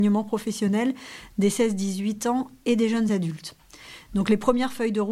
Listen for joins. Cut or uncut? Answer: uncut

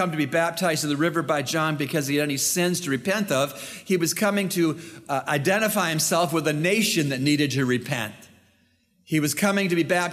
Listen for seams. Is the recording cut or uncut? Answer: uncut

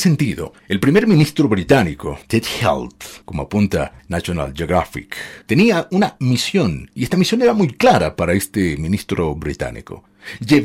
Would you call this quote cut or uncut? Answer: cut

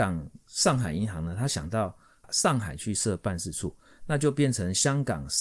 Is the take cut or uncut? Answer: uncut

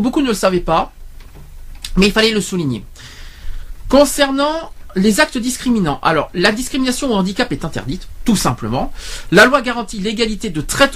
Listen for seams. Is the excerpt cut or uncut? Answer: uncut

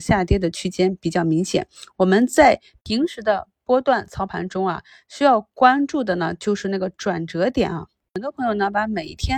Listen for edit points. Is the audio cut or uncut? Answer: uncut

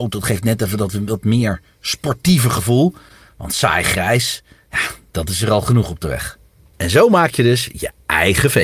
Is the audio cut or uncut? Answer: uncut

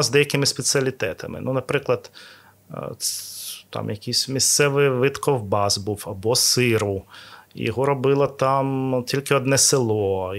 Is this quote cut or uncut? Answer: uncut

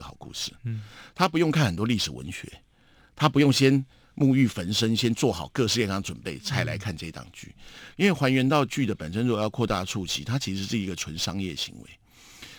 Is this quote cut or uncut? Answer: uncut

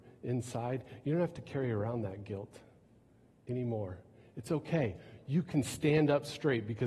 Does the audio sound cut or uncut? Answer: uncut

